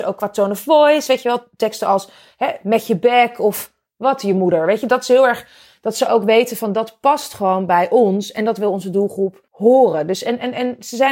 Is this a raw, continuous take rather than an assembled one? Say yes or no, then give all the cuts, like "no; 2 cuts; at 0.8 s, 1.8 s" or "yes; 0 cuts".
no; 1 cut; at 9.5 s